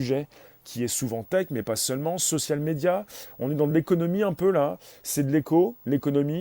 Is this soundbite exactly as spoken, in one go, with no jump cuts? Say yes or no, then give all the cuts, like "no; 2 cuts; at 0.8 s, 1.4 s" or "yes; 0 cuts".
yes; 0 cuts